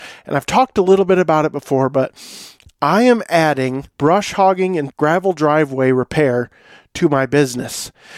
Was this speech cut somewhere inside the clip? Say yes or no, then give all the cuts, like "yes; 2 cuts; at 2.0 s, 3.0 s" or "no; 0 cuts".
yes; 2 cuts; at 3.9 s, 4.9 s